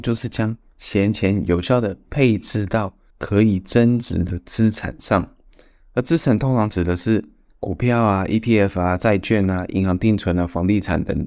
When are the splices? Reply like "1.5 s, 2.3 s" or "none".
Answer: 3.1 s